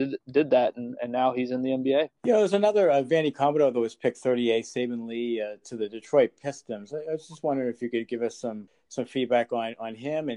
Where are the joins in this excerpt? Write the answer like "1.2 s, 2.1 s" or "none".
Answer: 2.2 s